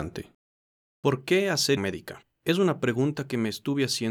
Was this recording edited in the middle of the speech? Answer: yes; 1 cut; at 1.8 s

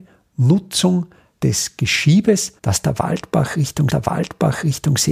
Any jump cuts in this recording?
yes; 2 cuts; at 2.6 s, 3.9 s

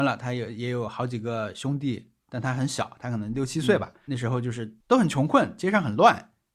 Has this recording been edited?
yes; 1 cut; at 4.8 s

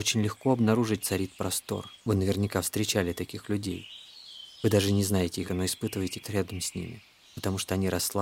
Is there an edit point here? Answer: yes; 4 cuts; at 1.0 s, 2.0 s, 5.4 s, 6.2 s

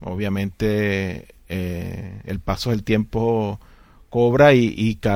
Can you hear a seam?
no; 0 cuts

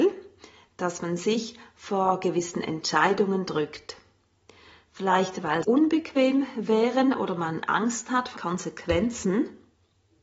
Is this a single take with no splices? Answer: no; 2 cuts; at 5.6 s, 8.4 s

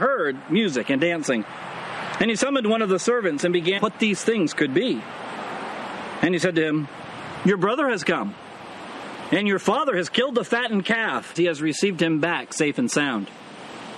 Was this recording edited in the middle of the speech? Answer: yes; 2 cuts; at 3.8 s, 11.3 s

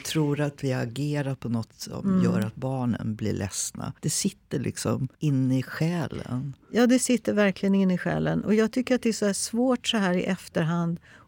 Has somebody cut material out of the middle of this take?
yes; 3 cuts; at 1.7 s, 4.0 s, 5.1 s

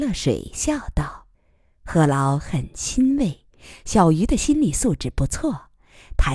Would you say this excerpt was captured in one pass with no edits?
no; 1 cut; at 1.3 s

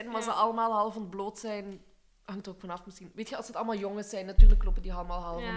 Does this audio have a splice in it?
no; 0 cuts

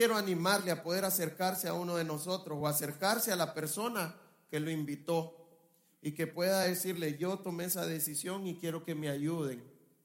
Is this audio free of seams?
yes; 0 cuts

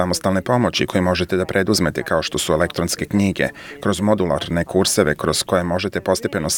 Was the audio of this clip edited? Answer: no; 0 cuts

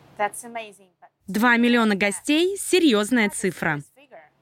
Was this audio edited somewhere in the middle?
no; 0 cuts

